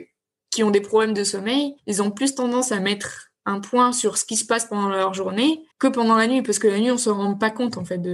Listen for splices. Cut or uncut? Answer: cut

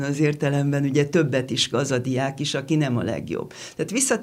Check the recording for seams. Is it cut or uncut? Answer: cut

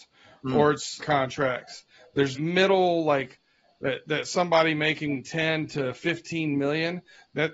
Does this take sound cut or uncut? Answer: cut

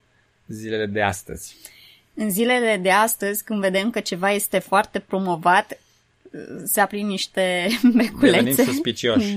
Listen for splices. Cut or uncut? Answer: uncut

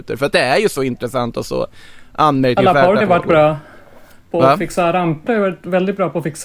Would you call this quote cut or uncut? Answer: cut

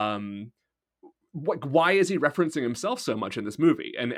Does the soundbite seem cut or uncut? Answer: uncut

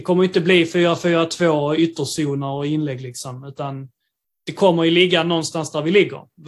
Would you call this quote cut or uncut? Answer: uncut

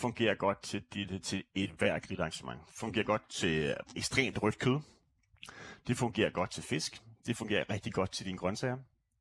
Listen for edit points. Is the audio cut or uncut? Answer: uncut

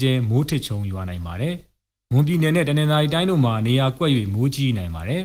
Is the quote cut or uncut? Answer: uncut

